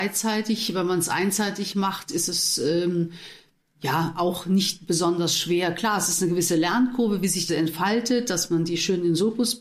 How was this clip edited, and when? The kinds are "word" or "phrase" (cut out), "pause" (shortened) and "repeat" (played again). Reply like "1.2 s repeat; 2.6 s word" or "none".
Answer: 7.5 s word